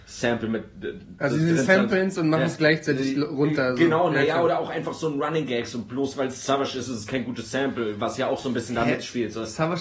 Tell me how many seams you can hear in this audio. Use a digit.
1